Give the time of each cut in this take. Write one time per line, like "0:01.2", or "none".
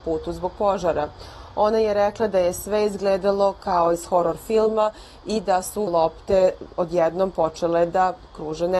0:05.9